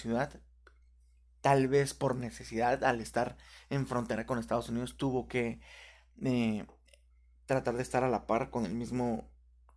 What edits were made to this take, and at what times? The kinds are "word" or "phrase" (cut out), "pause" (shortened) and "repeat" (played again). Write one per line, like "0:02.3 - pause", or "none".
none

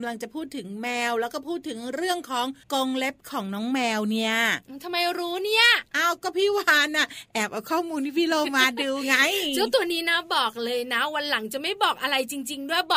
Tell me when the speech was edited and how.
0:02.6 - pause

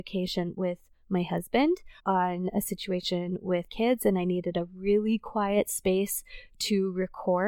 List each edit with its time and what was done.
0:02.0 - pause
0:03.7 - word

